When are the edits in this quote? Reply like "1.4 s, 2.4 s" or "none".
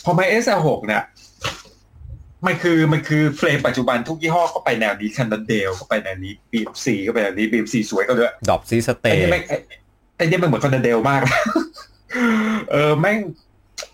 8.4 s